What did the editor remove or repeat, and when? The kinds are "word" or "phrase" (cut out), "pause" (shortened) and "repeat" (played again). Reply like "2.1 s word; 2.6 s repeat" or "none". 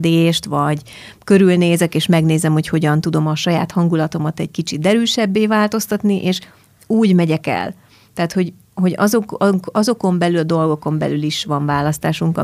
none